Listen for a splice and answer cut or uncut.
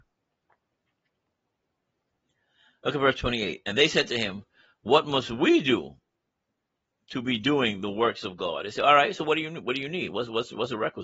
uncut